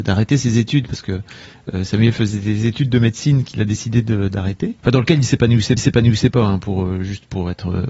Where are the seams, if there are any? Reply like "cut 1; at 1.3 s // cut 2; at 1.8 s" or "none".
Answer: cut 1; at 1.1 s // cut 2; at 4.8 s // cut 3; at 5.8 s